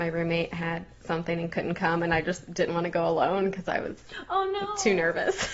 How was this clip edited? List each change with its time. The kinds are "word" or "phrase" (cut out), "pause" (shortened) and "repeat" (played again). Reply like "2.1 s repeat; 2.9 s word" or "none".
none